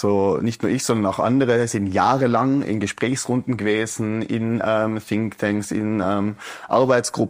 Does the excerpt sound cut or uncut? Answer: uncut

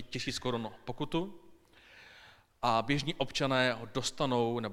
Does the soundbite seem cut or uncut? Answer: uncut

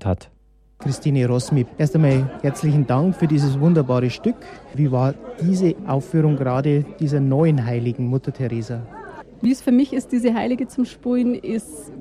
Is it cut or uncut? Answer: uncut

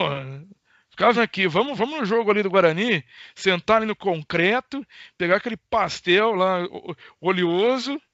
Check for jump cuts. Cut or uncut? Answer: cut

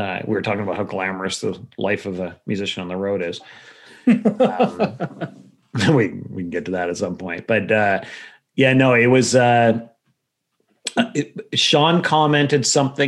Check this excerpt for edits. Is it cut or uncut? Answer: uncut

